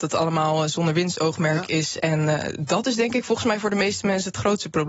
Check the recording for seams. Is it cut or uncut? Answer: uncut